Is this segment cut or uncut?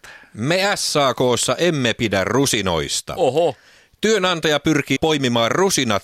cut